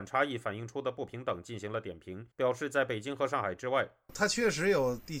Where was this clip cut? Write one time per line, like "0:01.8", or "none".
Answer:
0:02.3